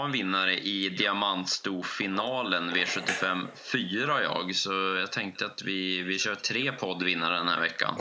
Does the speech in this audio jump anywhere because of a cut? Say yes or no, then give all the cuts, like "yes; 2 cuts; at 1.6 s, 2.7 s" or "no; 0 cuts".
no; 0 cuts